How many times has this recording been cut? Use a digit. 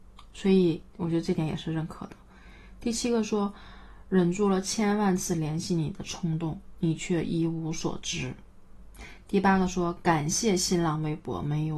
1